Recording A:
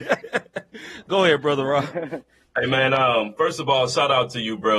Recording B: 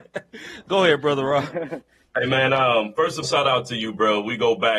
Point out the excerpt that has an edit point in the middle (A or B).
B